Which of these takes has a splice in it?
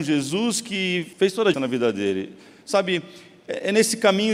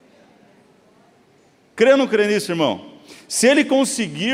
first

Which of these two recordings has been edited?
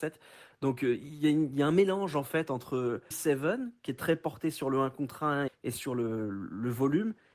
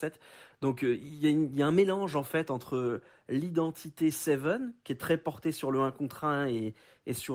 first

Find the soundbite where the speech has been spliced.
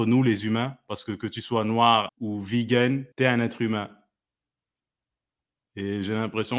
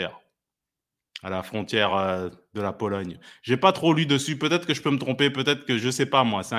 first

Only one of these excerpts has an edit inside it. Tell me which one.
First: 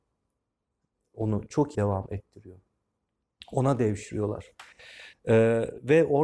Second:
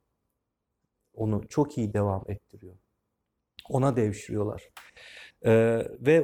first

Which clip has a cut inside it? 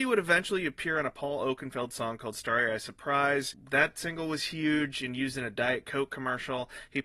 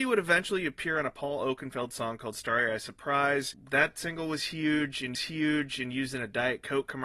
second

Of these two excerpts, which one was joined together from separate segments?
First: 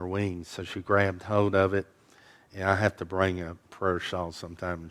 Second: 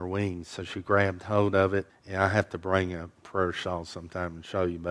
second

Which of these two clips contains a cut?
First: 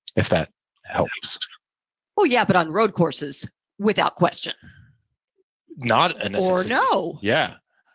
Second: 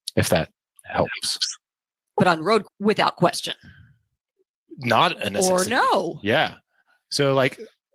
second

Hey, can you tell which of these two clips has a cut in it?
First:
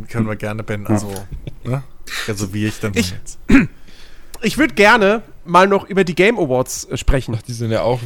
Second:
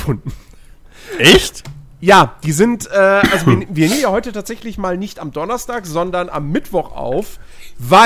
first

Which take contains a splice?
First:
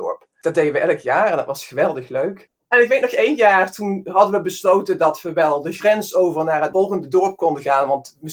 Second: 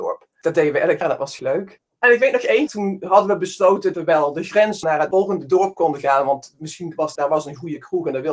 second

